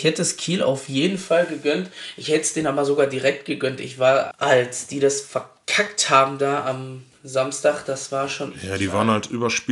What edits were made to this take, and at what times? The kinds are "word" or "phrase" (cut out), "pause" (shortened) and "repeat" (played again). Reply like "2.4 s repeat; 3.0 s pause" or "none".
4.3 s word